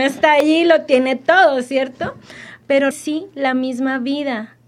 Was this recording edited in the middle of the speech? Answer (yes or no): yes